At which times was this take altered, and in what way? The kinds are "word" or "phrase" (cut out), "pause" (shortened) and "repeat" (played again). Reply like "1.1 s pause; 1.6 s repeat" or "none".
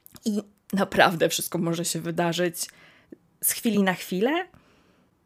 none